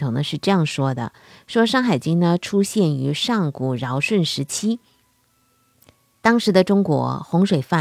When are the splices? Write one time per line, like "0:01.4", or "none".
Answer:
none